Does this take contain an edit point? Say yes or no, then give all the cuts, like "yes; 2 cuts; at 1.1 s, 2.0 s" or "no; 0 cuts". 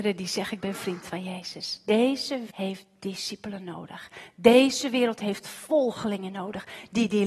yes; 1 cut; at 2.5 s